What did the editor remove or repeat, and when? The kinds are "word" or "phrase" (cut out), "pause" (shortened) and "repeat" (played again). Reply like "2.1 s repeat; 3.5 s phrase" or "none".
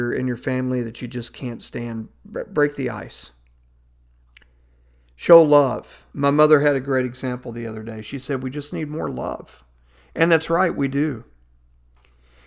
6.1 s pause